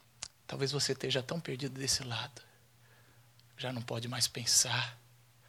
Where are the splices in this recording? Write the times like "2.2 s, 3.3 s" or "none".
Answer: none